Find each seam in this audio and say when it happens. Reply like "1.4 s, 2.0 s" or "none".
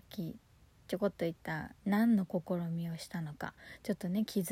1.8 s